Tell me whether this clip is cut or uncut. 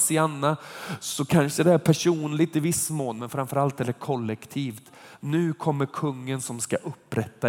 uncut